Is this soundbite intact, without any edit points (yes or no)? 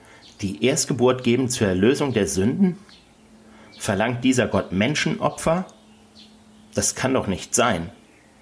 yes